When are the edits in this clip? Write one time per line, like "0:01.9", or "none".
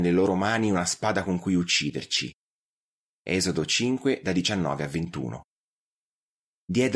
none